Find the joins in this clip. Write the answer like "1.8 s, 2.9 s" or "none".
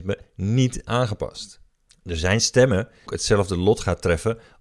1.9 s, 3.1 s